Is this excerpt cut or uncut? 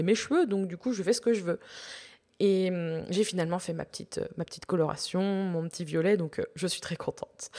uncut